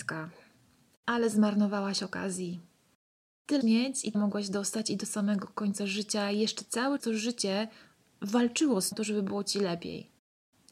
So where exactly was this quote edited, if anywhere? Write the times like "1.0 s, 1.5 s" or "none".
3.6 s, 4.1 s, 7.0 s, 8.9 s

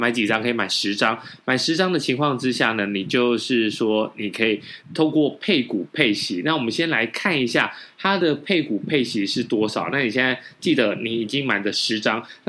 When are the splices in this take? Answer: 4.8 s

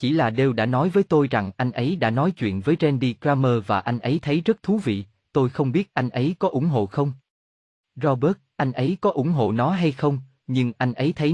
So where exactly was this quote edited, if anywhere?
none

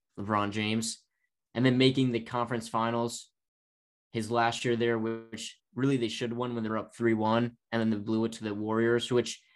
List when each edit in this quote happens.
none

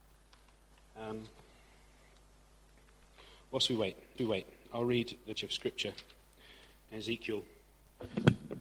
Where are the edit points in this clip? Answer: 4.2 s, 5.4 s, 6.9 s

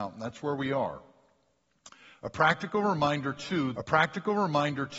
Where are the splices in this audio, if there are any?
3.7 s

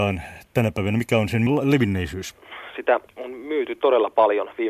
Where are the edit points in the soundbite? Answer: none

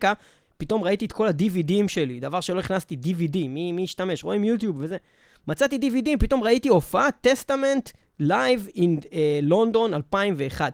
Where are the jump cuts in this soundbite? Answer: none

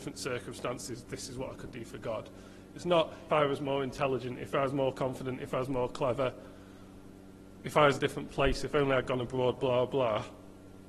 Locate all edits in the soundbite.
3.3 s, 7.9 s, 9.6 s

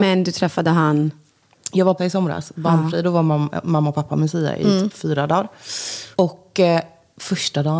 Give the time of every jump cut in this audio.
2.0 s, 6.1 s

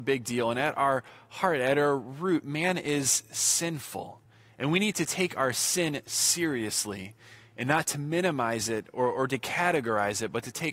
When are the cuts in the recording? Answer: none

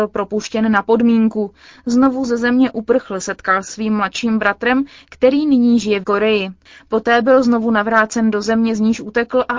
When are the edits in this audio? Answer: 3.7 s, 6.0 s

